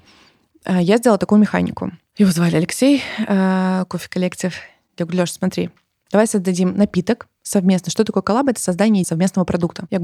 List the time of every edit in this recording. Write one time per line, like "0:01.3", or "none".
0:09.0